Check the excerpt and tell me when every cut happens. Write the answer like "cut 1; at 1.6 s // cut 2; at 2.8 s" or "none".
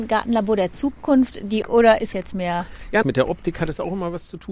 cut 1; at 1.6 s // cut 2; at 2.1 s // cut 3; at 3.0 s

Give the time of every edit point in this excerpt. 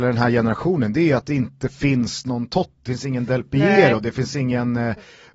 cut 1; at 2.9 s

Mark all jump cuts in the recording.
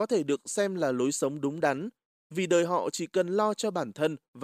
none

